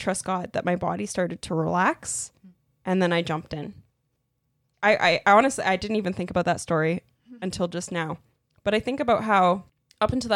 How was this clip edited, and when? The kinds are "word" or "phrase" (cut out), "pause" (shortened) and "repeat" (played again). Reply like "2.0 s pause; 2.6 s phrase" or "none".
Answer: none